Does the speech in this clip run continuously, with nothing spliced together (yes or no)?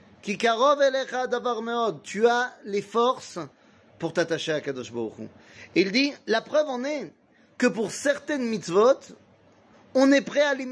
yes